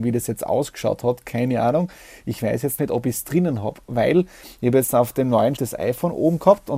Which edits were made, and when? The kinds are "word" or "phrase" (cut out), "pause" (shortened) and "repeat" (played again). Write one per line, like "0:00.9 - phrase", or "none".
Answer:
0:02.8 - word
0:05.6 - word